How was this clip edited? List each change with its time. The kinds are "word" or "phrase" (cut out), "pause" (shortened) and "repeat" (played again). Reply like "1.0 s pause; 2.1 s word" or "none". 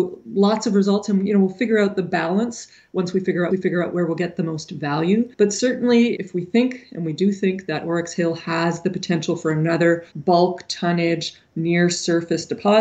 3.5 s repeat; 5.3 s pause; 6.2 s word; 10.1 s pause